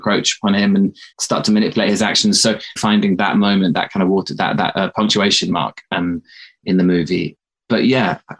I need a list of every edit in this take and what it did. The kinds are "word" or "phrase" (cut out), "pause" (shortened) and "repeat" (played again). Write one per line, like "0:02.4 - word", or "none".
0:01.1 - pause
0:02.8 - phrase